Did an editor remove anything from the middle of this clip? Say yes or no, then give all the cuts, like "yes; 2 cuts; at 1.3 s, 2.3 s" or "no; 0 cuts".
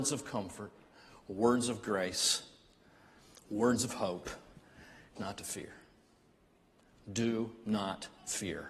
yes; 1 cut; at 5.2 s